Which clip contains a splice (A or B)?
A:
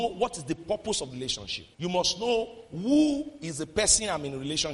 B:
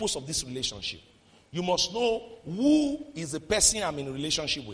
A